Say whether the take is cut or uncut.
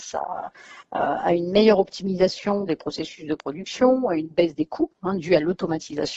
uncut